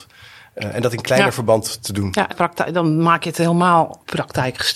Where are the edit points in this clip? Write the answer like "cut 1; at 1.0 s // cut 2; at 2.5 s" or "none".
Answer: cut 1; at 2.3 s